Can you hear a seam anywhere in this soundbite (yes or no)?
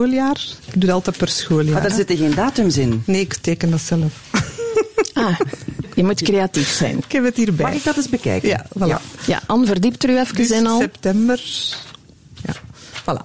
no